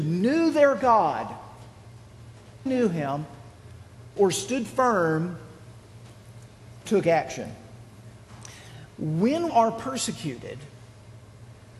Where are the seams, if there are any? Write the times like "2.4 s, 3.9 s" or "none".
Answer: 2.7 s, 4.2 s, 6.9 s, 9.5 s